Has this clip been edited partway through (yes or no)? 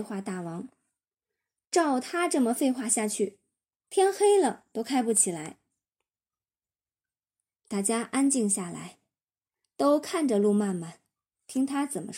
no